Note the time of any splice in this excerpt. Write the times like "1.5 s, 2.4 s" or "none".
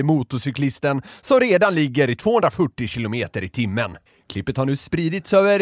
4.1 s